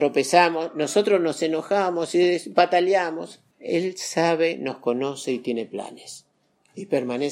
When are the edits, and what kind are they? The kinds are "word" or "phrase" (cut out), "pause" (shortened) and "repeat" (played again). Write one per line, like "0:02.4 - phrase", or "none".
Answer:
0:03.5 - pause